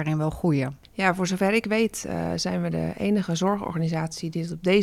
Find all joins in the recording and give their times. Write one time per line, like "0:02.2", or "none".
none